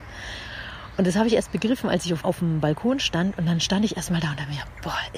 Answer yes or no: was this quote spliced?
yes